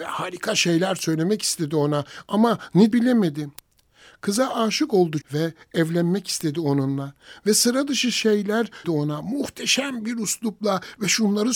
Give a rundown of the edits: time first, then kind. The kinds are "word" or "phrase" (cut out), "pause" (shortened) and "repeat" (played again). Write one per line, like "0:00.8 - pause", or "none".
0:02.9 - word
0:05.2 - word
0:08.8 - word